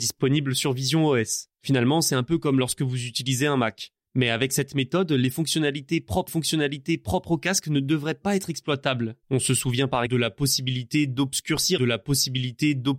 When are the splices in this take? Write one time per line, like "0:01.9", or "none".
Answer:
0:01.5
0:06.3
0:09.2
0:10.1
0:11.8